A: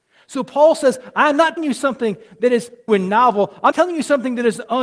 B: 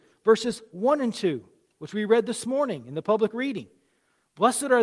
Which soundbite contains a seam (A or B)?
A